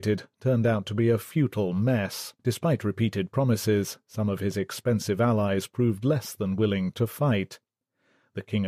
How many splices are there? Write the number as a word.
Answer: one